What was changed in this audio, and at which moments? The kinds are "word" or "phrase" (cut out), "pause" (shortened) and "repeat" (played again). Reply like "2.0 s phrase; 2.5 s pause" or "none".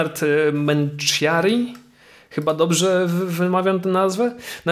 none